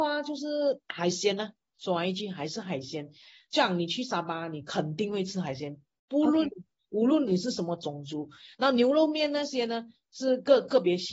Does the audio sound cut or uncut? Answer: uncut